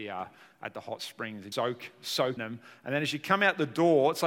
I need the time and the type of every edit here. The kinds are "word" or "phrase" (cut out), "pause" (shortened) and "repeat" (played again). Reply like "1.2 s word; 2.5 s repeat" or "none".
1.5 s word; 2.4 s word